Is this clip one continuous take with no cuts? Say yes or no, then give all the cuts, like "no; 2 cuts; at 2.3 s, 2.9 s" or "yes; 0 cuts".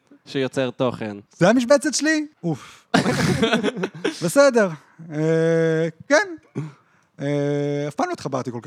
no; 2 cuts; at 1.3 s, 2.3 s